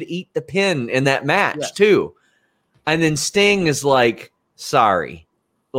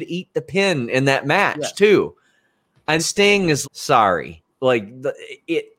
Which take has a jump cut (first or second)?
second